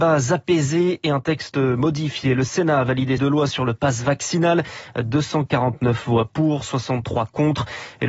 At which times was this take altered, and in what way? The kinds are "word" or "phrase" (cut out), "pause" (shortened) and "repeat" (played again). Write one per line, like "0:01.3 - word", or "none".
0:03.2 - phrase